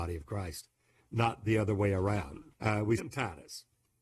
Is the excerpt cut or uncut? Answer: cut